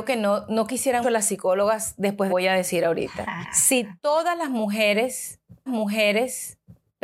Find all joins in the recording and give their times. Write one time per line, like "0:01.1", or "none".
0:01.0
0:02.3
0:03.4
0:05.7